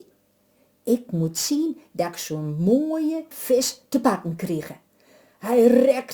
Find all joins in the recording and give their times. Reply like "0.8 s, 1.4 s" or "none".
3.3 s